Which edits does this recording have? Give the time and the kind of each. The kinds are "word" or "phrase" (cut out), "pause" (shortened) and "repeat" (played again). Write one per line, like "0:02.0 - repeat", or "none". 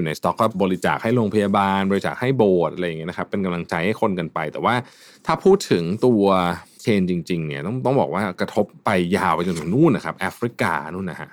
0:06.8 - word